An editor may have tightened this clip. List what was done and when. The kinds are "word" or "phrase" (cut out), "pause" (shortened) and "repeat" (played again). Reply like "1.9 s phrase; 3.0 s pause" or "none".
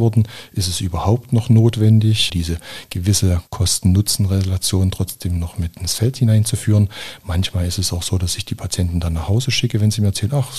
2.3 s word; 3.5 s pause